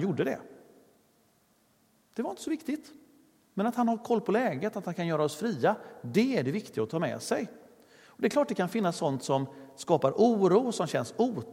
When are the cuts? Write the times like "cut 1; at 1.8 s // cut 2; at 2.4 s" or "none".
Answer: none